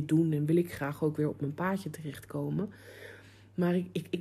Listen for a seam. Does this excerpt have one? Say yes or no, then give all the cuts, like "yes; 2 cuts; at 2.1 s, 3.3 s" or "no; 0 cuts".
no; 0 cuts